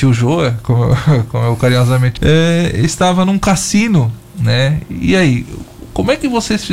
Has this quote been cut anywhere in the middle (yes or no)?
yes